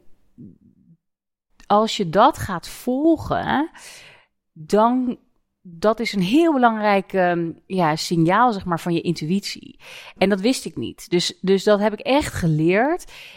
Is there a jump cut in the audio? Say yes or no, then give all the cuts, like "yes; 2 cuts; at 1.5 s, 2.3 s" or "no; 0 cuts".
no; 0 cuts